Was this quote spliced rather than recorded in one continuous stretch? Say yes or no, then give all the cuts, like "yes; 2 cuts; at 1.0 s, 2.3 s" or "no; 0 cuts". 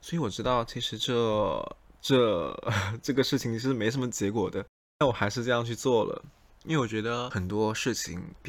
no; 0 cuts